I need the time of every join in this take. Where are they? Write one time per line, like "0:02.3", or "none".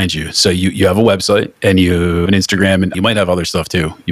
0:02.3
0:02.9